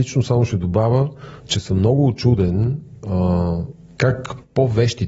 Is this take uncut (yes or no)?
yes